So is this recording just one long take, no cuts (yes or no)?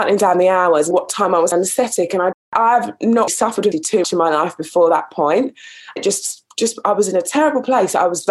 no